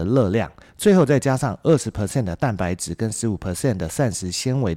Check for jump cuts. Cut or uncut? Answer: uncut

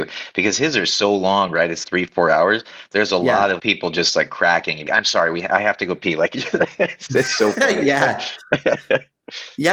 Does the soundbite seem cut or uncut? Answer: cut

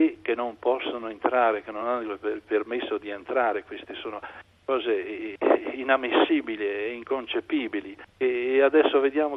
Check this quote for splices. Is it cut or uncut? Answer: uncut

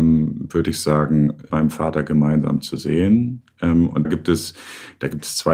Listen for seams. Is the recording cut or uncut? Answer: cut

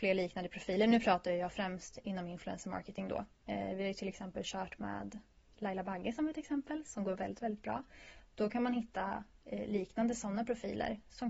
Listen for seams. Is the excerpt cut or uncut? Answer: uncut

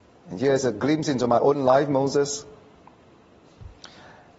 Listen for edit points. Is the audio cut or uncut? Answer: uncut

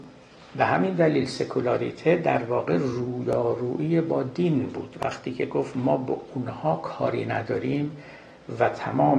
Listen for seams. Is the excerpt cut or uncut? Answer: uncut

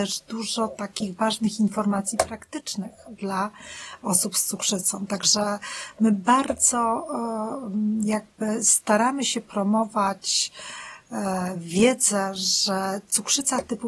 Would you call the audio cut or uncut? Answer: uncut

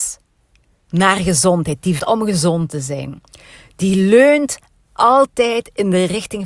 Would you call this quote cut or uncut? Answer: cut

